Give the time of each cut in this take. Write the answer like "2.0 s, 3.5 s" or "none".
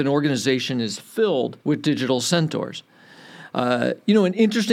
1.6 s